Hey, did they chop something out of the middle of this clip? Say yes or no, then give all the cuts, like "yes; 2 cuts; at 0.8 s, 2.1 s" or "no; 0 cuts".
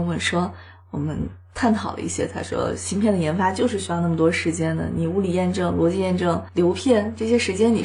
no; 0 cuts